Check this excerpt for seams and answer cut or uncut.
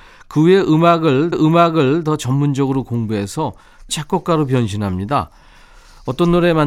cut